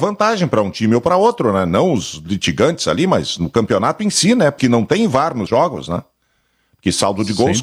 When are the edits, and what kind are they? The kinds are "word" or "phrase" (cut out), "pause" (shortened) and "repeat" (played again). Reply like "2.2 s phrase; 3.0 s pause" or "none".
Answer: 4.6 s word; 5.5 s word